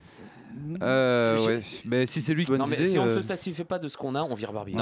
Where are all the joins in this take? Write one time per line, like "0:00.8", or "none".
0:02.5